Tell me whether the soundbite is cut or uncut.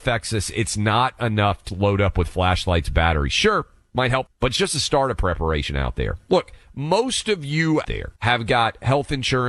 cut